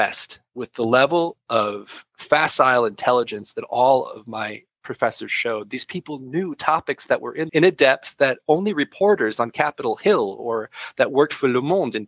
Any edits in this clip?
yes; 1 cut; at 7.5 s

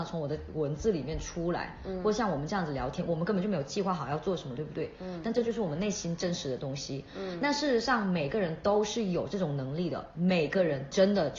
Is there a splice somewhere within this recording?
no; 0 cuts

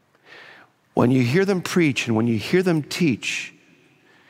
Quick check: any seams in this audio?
no; 0 cuts

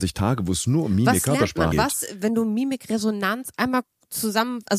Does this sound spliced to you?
yes; 1 cut; at 1.7 s

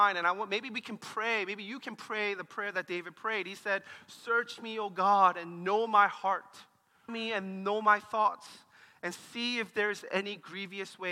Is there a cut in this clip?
yes; 1 cut; at 7.1 s

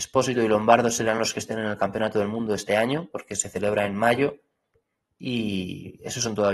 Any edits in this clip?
no; 0 cuts

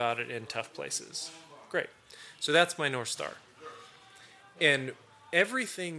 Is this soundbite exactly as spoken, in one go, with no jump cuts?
yes; 0 cuts

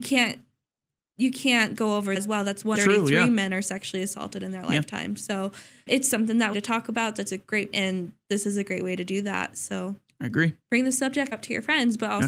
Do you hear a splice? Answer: yes; 7 cuts; at 1.8 s, 2.2 s, 2.8 s, 5.9 s, 6.5 s, 7.7 s, 11.3 s

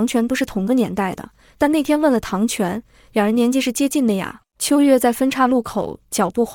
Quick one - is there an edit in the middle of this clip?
yes; 1 cut; at 4.5 s

